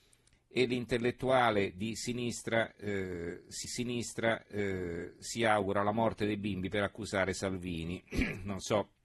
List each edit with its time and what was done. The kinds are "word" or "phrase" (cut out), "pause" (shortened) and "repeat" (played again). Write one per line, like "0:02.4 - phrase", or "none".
0:03.6 - repeat